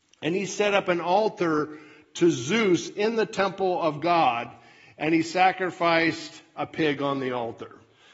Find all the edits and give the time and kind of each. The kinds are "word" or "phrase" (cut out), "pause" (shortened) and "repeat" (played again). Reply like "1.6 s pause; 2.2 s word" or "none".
none